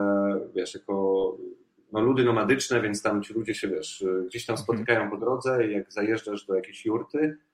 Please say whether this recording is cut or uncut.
cut